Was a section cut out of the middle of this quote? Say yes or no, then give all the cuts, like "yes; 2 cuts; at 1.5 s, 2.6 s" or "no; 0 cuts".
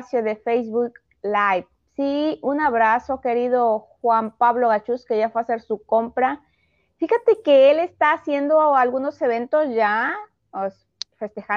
no; 0 cuts